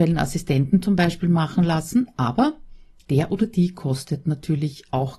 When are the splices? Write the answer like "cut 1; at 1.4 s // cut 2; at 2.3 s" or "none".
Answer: none